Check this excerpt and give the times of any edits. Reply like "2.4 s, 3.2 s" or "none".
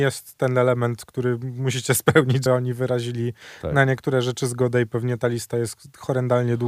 2.5 s